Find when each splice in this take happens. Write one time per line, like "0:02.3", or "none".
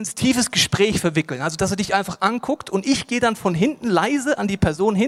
none